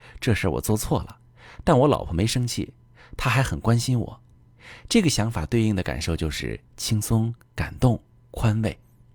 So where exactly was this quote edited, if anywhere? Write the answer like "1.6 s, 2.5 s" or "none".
none